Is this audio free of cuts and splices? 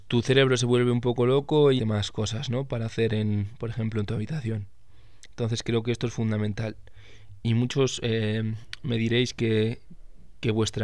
no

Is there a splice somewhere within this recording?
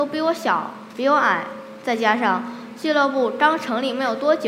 no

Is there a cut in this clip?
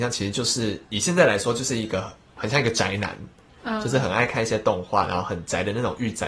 no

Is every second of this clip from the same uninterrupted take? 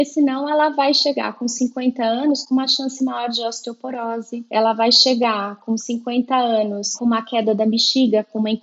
yes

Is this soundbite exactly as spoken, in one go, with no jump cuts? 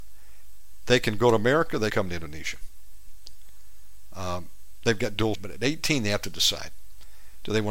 no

